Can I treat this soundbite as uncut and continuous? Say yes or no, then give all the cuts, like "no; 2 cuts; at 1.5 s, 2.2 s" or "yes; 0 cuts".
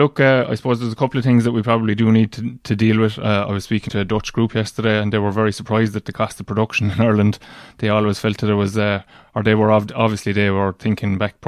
no; 1 cut; at 3.9 s